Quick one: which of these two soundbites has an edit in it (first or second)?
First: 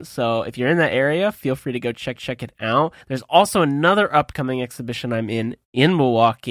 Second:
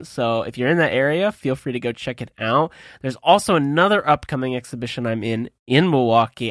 first